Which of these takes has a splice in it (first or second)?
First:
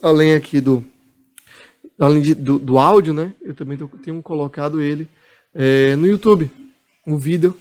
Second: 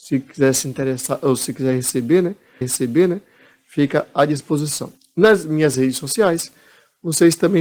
second